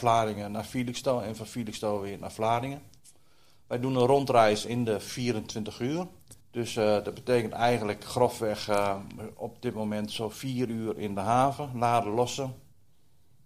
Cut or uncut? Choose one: cut